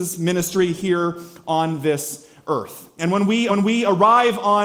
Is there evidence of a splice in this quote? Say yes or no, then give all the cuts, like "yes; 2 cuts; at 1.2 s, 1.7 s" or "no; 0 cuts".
yes; 1 cut; at 3.5 s